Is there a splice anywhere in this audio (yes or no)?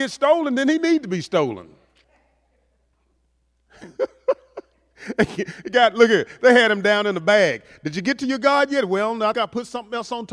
yes